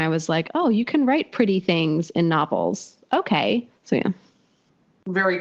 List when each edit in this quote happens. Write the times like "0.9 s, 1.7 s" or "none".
3.7 s

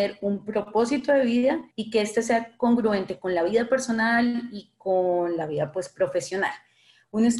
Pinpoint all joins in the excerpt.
1.7 s

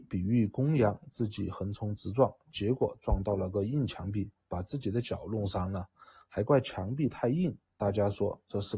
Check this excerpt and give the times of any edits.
none

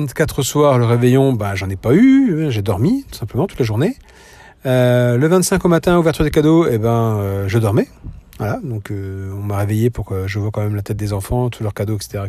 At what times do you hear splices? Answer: none

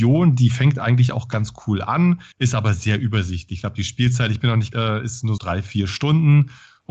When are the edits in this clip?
2.3 s, 4.7 s, 5.4 s

